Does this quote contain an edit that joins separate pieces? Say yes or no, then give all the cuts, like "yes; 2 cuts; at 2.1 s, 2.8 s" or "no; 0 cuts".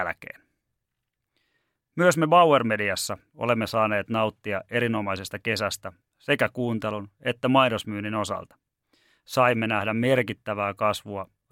no; 0 cuts